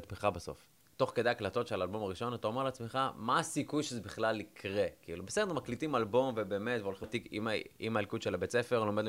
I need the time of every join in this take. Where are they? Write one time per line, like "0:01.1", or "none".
0:07.0